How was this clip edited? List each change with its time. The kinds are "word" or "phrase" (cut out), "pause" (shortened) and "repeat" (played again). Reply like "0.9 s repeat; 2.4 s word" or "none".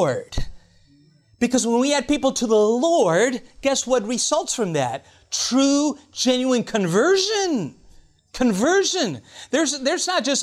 none